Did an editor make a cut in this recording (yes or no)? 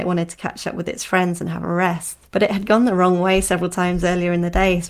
yes